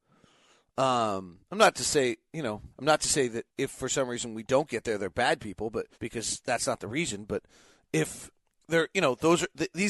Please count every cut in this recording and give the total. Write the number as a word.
four